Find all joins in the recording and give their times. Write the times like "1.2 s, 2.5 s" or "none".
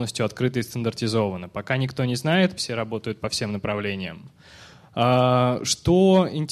2.6 s